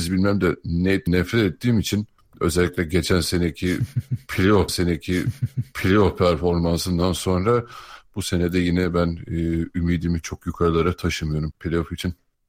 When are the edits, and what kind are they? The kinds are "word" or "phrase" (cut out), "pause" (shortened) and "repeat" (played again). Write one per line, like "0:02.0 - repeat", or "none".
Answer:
0:01.1 - word
0:02.2 - pause
0:04.7 - repeat
0:11.5 - word

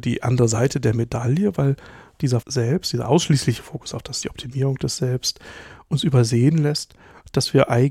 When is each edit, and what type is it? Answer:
0:02.4 - phrase
0:04.2 - word

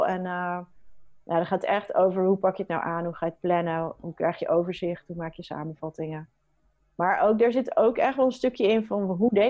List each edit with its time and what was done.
none

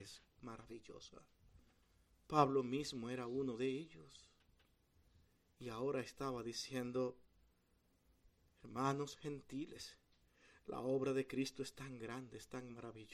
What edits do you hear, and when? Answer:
none

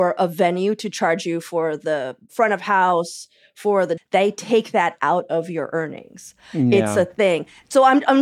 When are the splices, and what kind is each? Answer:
0:04.0 - phrase

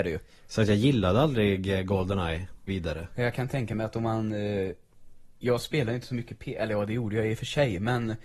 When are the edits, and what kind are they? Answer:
0:02.7 - word
0:05.3 - pause

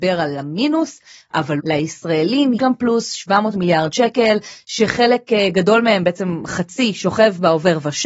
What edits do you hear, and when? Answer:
0:01.6 - word
0:02.6 - word

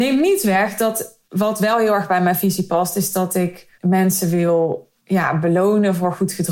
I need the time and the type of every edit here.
0:01.3 - pause
0:03.7 - pause
0:05.0 - pause

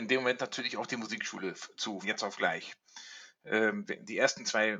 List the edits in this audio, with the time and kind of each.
0:02.0 - word

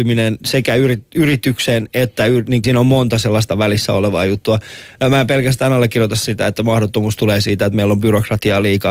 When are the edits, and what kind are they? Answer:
0:02.6 - phrase

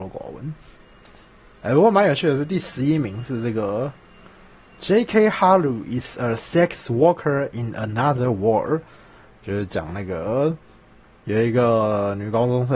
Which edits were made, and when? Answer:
none

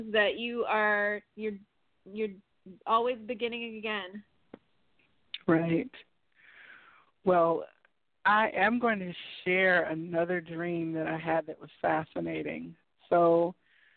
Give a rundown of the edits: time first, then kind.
0:11.8 - word

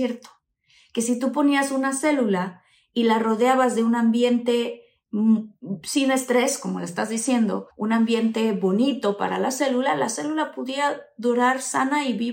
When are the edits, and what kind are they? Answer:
0:07.7 - pause

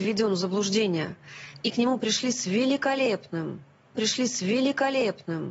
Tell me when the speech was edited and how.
0:03.9 - repeat

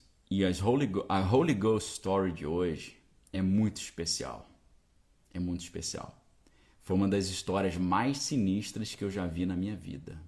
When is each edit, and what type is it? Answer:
none

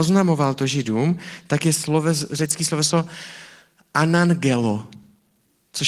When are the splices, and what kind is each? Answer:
none

